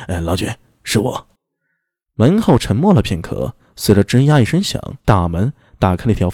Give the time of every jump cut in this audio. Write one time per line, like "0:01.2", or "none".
0:01.4
0:05.0